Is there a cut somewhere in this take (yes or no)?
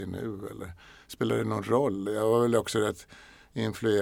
no